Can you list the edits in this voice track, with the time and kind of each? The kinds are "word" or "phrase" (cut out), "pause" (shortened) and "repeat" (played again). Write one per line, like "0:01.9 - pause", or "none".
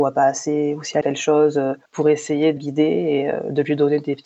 0:01.0 - phrase
0:01.8 - pause
0:02.6 - word